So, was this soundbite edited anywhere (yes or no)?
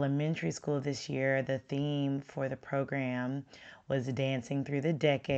no